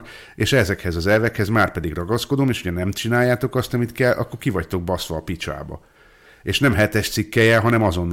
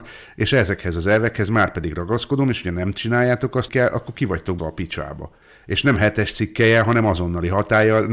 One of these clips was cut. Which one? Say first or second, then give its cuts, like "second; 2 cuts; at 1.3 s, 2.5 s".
second; 3 cuts; at 3.7 s, 4.6 s, 5.4 s